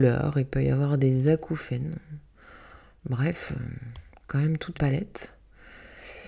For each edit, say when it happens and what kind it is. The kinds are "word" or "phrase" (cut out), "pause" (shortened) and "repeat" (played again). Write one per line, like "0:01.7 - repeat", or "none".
0:04.7 - word